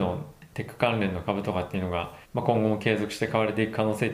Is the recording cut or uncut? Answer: cut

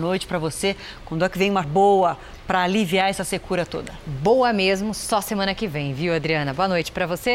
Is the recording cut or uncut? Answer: cut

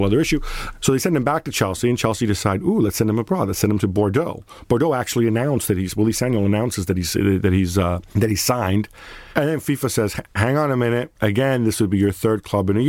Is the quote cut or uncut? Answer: cut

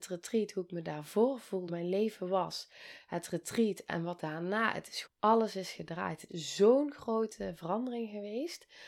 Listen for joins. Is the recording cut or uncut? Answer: cut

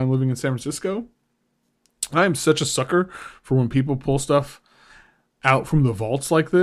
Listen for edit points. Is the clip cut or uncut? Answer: uncut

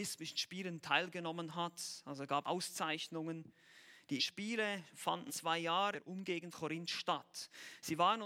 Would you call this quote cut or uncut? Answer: cut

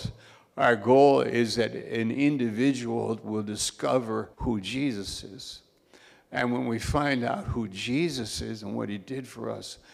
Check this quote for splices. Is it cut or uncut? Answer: cut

